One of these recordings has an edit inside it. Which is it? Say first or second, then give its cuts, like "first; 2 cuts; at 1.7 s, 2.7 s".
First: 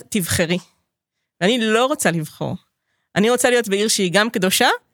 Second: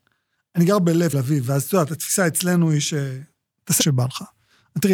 second; 2 cuts; at 1.1 s, 3.8 s